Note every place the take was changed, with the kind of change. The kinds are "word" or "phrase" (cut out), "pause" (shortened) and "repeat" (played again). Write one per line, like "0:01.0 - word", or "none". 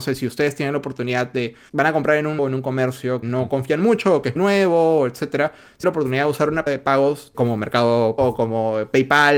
0:01.7 - word
0:02.4 - word
0:03.2 - word
0:04.4 - word
0:05.8 - word
0:06.7 - word
0:07.3 - word
0:08.2 - word